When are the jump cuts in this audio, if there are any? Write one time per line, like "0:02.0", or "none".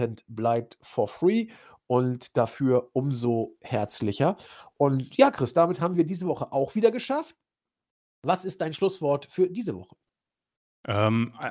none